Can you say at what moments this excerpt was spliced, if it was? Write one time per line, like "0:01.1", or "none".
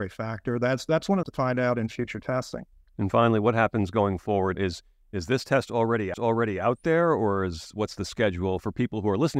0:01.2
0:04.5
0:06.1